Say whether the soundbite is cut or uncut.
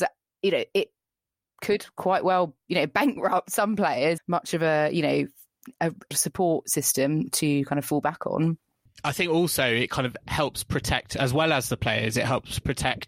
cut